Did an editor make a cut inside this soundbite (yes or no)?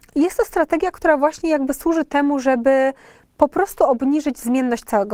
no